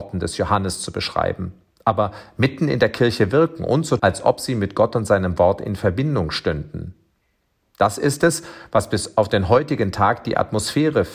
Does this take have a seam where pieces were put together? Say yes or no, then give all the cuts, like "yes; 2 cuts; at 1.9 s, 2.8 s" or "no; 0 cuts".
yes; 1 cut; at 4.0 s